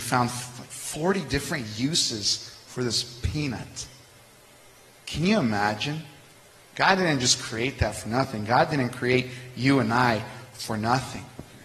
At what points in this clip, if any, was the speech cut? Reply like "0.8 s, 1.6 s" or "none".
none